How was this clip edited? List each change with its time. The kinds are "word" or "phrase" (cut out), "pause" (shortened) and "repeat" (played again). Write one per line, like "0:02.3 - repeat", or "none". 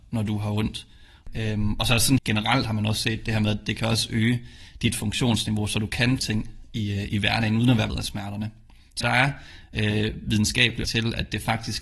0:02.2 - word
0:06.2 - word
0:07.9 - word
0:09.0 - word
0:10.8 - word